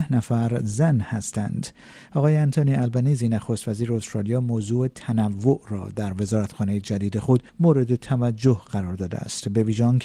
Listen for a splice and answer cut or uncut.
cut